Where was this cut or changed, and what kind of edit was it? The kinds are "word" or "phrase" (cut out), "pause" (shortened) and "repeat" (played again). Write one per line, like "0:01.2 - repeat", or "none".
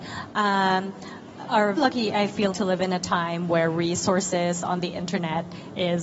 0:01.4 - word
0:01.8 - word
0:02.5 - word